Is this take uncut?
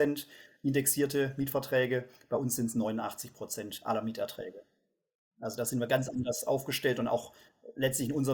yes; 0 cuts

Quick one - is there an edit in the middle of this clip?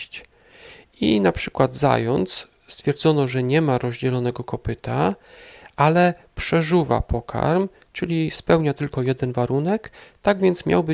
no; 0 cuts

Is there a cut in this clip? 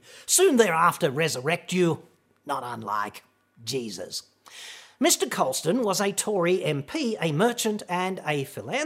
no; 0 cuts

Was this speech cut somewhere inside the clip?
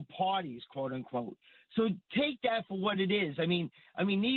no; 0 cuts

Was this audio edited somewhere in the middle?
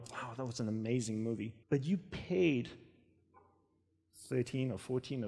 yes; 1 cut; at 1.6 s

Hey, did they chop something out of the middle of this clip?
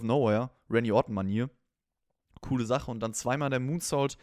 no; 0 cuts

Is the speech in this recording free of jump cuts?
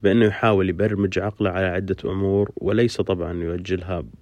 yes; 0 cuts

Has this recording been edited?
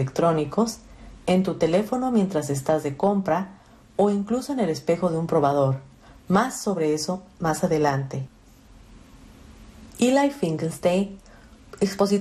no; 0 cuts

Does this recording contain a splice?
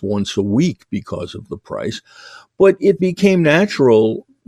yes; 1 cut; at 3.0 s

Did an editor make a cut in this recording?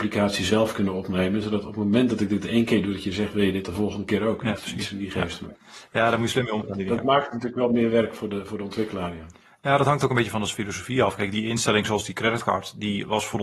yes; 1 cut; at 11.3 s

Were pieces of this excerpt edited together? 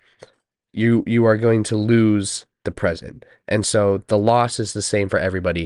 no; 0 cuts

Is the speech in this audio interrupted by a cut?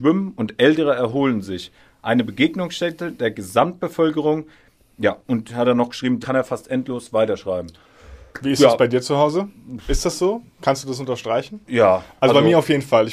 yes; 1 cut; at 6.2 s

